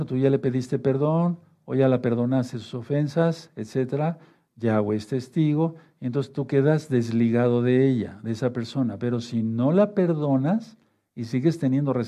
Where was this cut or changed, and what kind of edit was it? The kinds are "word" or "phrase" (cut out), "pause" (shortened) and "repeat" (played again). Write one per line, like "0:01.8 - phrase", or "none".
none